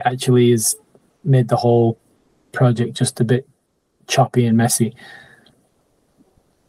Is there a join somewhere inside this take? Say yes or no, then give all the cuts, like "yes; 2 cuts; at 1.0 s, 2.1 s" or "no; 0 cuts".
no; 0 cuts